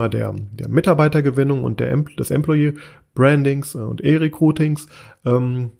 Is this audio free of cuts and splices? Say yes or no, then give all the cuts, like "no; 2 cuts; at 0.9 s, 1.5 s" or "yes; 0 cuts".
yes; 0 cuts